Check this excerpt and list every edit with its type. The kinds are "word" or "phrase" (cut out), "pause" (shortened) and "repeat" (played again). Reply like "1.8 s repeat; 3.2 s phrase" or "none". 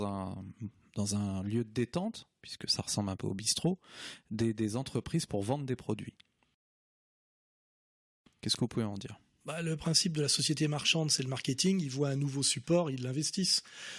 none